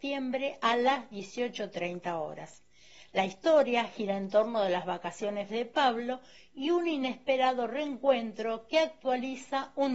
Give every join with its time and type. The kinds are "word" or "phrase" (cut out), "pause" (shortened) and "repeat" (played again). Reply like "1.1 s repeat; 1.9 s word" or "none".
5.5 s word